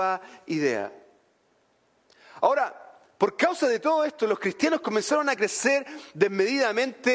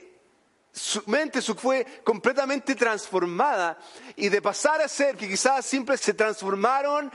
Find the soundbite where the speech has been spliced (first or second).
second